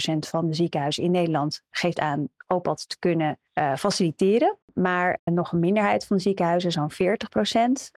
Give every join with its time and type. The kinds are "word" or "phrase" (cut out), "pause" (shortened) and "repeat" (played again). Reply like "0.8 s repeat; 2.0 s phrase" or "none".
3.5 s pause; 4.6 s pause